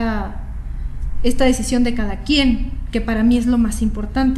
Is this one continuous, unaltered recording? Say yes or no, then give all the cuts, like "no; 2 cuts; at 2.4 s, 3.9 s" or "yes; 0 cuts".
yes; 0 cuts